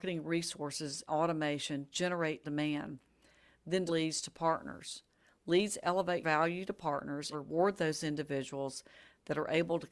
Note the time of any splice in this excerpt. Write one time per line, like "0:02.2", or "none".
0:01.1
0:01.9
0:02.4
0:03.9
0:06.2
0:07.3